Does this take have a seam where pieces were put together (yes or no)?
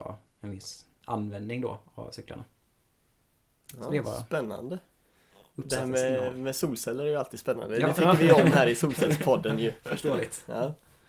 no